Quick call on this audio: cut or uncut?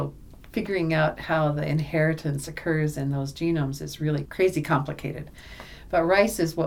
uncut